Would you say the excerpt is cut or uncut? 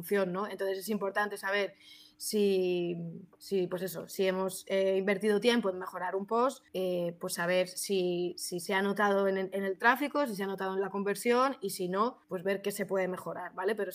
cut